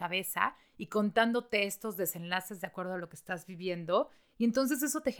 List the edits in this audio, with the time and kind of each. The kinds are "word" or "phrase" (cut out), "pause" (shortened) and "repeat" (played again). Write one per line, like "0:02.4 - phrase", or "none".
none